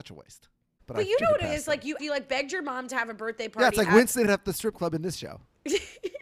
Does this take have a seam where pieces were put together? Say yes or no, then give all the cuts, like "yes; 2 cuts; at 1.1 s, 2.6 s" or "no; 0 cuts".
yes; 2 cuts; at 2.0 s, 4.3 s